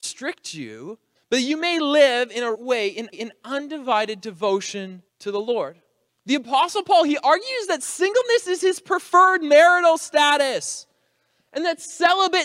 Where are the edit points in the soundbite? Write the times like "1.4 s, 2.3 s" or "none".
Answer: 1.1 s, 2.5 s, 3.1 s, 5.1 s, 6.1 s